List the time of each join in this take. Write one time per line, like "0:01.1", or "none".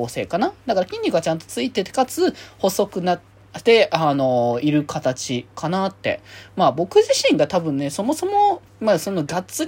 0:08.7